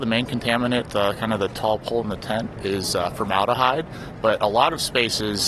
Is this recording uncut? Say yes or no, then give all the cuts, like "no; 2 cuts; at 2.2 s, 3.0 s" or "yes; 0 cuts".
yes; 0 cuts